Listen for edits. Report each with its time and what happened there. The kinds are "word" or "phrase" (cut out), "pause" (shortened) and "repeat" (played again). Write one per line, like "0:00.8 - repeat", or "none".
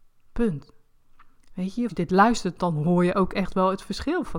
0:01.9 - phrase